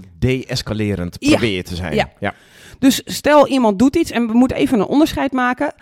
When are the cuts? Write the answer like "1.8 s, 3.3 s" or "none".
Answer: none